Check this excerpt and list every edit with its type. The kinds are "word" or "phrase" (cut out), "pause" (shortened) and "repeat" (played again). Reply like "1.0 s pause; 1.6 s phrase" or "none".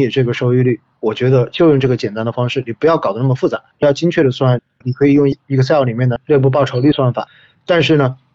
3.7 s pause